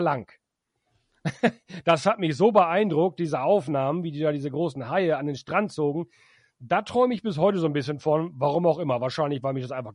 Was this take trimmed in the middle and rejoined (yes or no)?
no